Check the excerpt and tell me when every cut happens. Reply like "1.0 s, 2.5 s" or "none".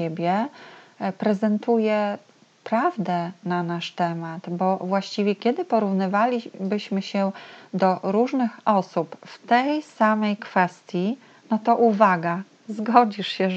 none